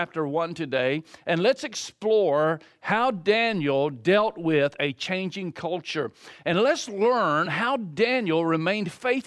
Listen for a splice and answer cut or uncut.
uncut